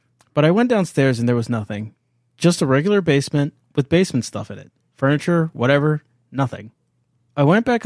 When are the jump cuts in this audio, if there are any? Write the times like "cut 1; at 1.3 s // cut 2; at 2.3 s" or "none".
none